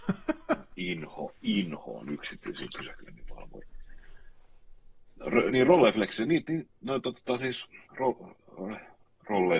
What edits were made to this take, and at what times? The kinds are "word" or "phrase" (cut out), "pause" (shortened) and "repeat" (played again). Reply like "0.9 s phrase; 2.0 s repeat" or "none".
7.9 s pause